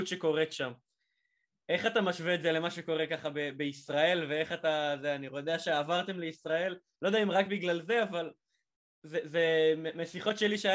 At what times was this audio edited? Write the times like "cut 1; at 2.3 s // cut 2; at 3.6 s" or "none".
none